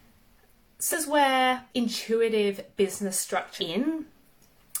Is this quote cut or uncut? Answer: cut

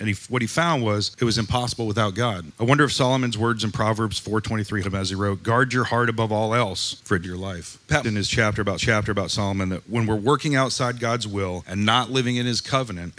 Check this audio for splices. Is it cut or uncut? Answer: cut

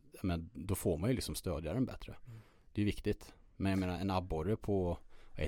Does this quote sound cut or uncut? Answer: uncut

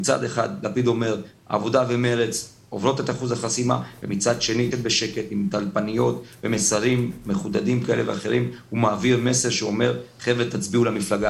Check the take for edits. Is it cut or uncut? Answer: cut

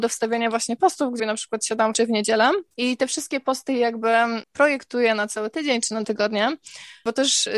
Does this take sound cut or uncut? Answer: cut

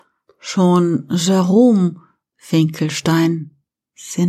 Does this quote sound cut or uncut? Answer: cut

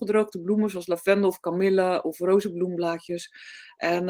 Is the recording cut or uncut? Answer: uncut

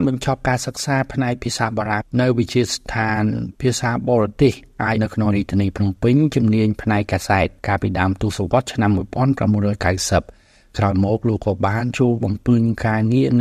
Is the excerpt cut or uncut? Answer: cut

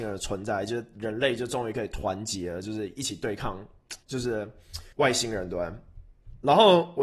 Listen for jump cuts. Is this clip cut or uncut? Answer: cut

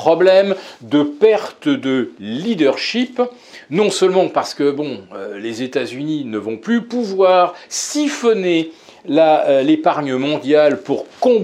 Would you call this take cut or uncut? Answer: uncut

